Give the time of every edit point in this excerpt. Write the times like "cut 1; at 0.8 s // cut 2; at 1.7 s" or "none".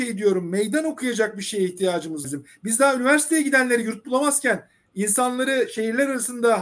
cut 1; at 2.2 s